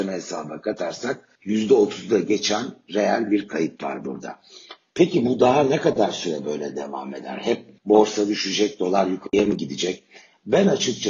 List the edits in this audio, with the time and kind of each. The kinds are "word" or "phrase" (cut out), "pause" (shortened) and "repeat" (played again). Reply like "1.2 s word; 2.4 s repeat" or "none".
1.4 s pause; 7.8 s pause